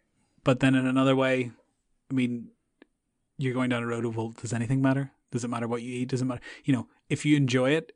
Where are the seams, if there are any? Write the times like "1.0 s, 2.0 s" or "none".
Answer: none